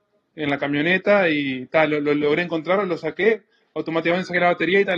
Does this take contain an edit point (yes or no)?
no